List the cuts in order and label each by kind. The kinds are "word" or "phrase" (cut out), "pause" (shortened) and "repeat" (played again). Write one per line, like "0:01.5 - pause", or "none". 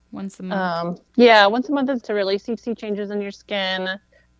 0:01.1 - pause
0:02.0 - word
0:02.6 - repeat

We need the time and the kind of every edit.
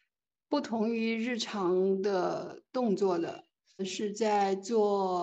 0:03.8 - word

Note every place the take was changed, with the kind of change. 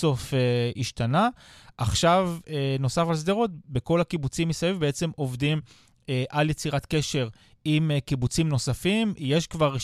none

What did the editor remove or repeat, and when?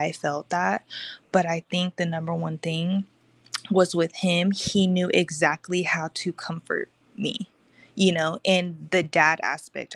none

